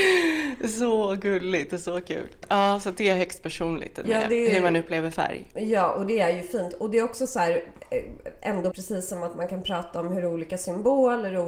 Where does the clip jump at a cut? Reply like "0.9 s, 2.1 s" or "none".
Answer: 4.0 s, 8.7 s

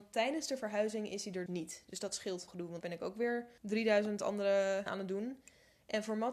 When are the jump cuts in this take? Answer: 1.5 s, 2.5 s, 2.8 s, 3.6 s, 4.9 s

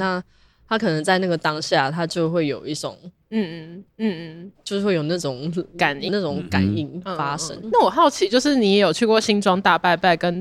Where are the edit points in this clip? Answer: 3.9 s, 6.1 s, 7.6 s

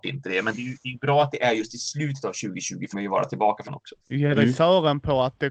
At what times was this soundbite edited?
2.9 s, 3.7 s, 4.0 s

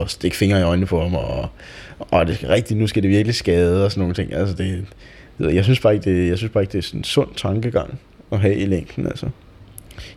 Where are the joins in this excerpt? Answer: none

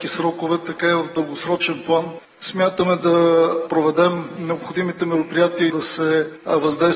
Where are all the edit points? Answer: 5.7 s

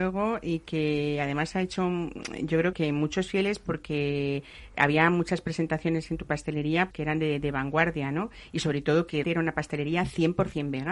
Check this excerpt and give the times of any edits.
2.7 s, 6.9 s, 9.2 s

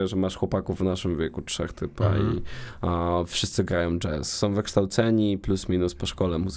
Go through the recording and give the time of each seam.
none

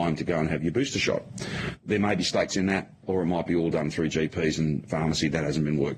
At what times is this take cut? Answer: 2.5 s

